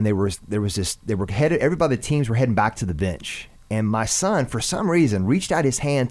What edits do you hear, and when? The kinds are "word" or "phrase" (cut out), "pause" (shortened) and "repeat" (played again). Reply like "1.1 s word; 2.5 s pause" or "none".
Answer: none

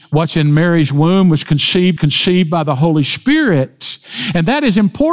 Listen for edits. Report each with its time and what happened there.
2.0 s repeat

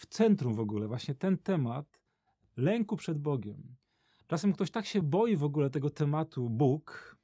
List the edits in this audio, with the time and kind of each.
none

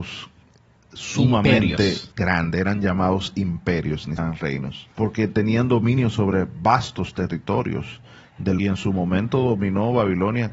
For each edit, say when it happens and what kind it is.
2.1 s pause; 4.2 s word; 4.9 s pause; 8.6 s phrase

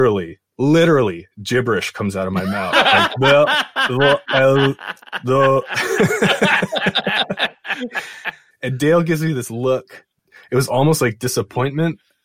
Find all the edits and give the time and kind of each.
none

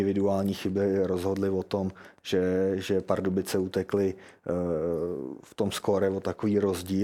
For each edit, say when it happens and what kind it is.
none

